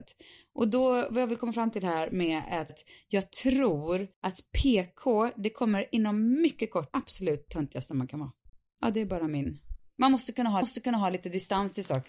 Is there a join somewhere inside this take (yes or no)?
yes